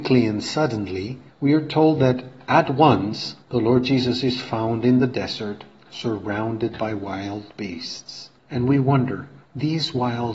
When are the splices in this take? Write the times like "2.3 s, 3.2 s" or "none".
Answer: 1.3 s, 3.4 s, 8.4 s, 9.4 s